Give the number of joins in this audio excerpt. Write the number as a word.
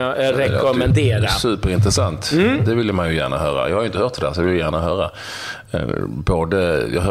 zero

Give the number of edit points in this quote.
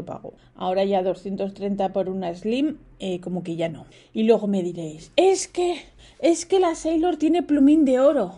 zero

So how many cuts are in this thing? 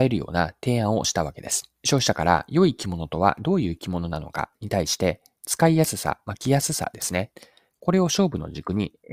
one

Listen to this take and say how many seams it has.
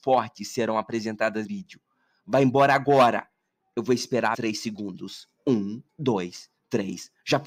three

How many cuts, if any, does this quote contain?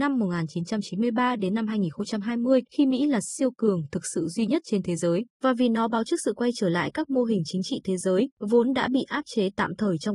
three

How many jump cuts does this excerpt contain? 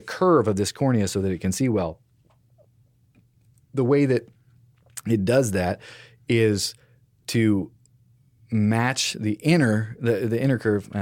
zero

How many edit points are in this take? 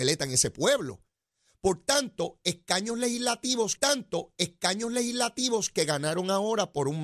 one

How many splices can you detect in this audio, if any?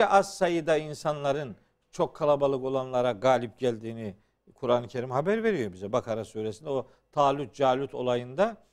zero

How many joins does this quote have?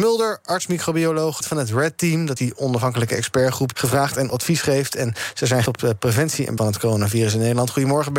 six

